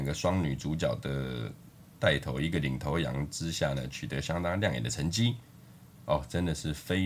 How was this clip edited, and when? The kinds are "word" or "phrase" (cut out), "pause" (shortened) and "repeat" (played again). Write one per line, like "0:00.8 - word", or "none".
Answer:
none